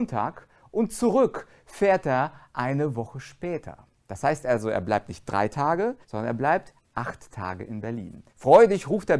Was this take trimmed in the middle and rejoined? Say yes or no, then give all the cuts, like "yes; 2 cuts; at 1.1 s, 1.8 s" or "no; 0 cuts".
yes; 2 cuts; at 6.0 s, 8.3 s